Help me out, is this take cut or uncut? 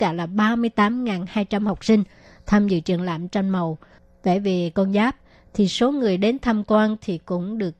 uncut